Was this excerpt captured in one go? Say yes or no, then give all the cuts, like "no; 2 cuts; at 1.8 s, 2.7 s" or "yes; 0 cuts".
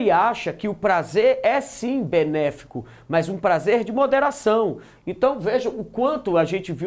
yes; 0 cuts